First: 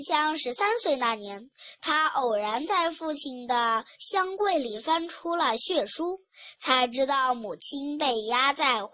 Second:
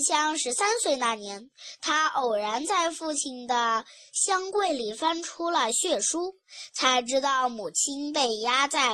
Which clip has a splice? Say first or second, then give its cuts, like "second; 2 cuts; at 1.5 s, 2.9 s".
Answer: first; 1 cut; at 3.9 s